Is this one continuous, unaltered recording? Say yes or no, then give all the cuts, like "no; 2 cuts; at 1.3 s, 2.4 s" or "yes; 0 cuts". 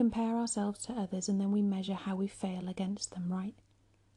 yes; 0 cuts